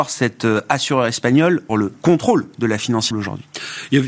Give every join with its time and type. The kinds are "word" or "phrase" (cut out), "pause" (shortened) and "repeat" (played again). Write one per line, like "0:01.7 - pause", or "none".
0:01.7 - word
0:03.1 - word